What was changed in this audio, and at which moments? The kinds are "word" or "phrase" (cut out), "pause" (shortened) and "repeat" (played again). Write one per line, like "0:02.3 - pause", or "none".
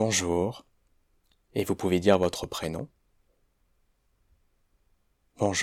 none